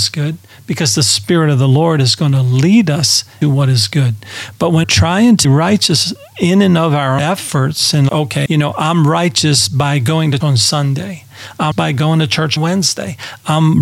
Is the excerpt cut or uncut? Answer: cut